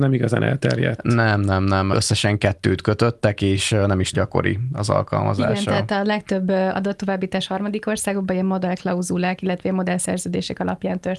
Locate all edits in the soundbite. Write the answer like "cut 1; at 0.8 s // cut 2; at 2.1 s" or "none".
cut 1; at 4.1 s

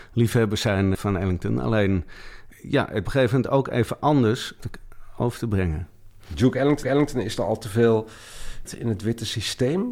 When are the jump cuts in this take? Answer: cut 1; at 0.9 s // cut 2; at 2.5 s // cut 3; at 3.0 s // cut 4; at 4.6 s // cut 5; at 6.8 s // cut 6; at 8.6 s

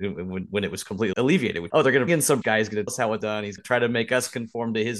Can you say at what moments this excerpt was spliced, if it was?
cut 1; at 1.1 s // cut 2; at 1.7 s // cut 3; at 2.1 s // cut 4; at 2.4 s // cut 5; at 2.9 s // cut 6; at 3.2 s // cut 7; at 3.6 s

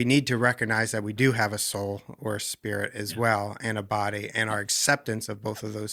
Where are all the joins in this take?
none

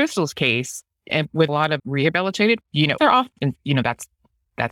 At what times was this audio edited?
cut 1; at 1.1 s // cut 2; at 1.5 s // cut 3; at 1.8 s // cut 4; at 2.6 s // cut 5; at 3.0 s // cut 6; at 3.3 s

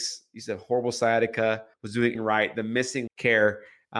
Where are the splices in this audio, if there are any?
cut 1; at 1.7 s // cut 2; at 2.2 s // cut 3; at 3.1 s

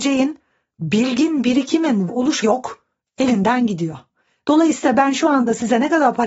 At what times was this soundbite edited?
cut 1; at 2.1 s // cut 2; at 2.4 s

